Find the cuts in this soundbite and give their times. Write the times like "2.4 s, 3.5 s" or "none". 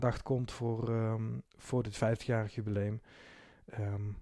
1.4 s